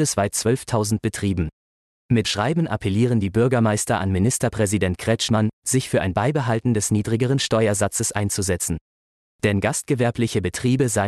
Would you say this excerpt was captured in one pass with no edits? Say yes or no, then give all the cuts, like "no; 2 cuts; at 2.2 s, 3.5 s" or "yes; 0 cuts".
no; 1 cut; at 2.2 s